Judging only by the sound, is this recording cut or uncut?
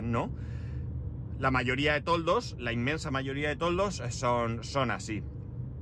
uncut